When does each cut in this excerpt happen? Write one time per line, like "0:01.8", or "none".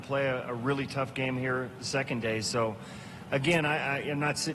none